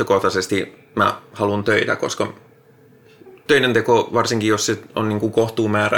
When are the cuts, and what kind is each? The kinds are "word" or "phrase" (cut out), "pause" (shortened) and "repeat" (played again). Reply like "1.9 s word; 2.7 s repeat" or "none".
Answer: none